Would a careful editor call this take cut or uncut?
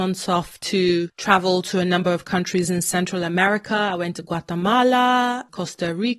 uncut